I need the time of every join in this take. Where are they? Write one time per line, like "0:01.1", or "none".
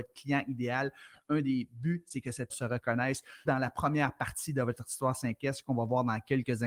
0:02.5
0:03.5